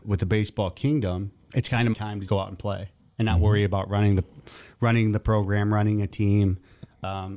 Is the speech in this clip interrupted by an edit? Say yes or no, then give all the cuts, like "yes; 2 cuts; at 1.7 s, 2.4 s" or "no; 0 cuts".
yes; 2 cuts; at 1.9 s, 2.3 s